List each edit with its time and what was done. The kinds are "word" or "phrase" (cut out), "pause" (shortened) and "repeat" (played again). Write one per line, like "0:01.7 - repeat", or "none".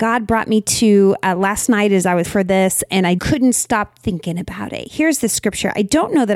0:02.2 - word
0:03.2 - word